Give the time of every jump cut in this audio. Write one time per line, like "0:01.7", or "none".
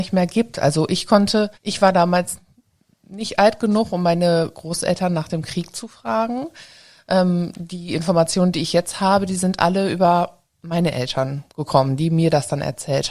0:01.5